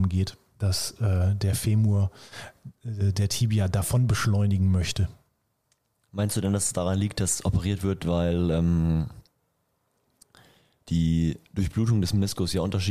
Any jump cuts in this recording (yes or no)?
no